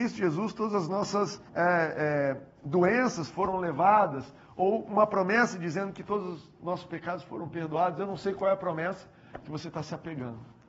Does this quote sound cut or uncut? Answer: cut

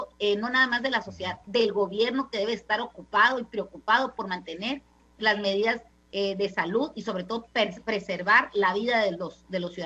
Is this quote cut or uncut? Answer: uncut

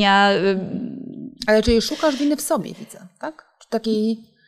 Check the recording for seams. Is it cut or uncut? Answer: uncut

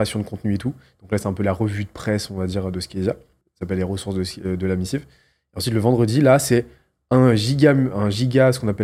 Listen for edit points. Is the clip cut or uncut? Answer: uncut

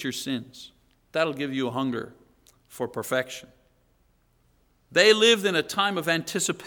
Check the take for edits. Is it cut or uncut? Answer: uncut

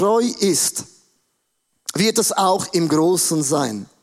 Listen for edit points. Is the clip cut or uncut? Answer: uncut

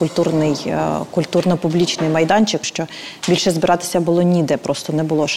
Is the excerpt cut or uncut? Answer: cut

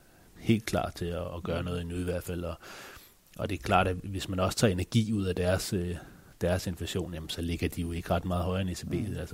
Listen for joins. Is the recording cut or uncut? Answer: uncut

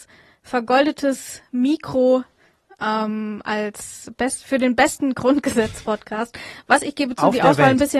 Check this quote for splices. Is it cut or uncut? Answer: uncut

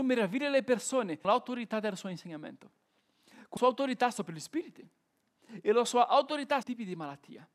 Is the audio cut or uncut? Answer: cut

